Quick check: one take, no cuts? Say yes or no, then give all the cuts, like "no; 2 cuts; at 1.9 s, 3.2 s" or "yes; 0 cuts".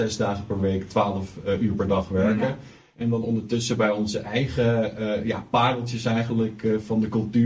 yes; 0 cuts